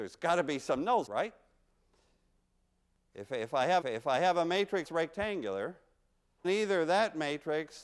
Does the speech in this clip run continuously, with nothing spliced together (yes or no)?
no